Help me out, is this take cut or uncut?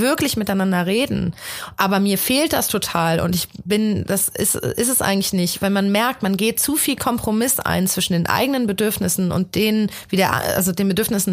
uncut